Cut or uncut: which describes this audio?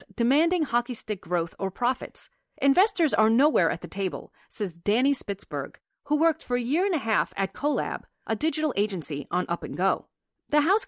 uncut